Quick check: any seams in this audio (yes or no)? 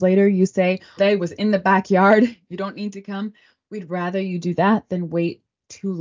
yes